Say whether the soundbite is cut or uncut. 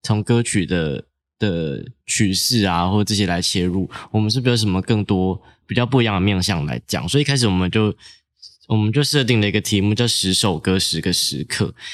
cut